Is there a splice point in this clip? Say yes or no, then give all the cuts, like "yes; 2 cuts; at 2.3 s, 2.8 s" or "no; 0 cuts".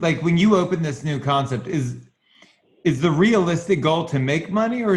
no; 0 cuts